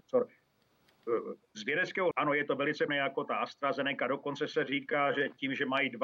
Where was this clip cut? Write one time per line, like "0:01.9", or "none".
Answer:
0:02.1
0:02.9